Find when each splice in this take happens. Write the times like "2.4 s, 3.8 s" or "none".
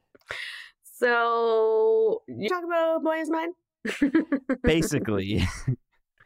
2.5 s